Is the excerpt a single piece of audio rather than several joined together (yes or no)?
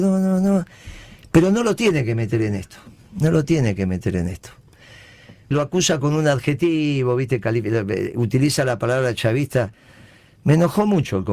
no